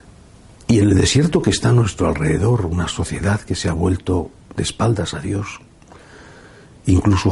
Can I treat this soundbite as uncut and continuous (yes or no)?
yes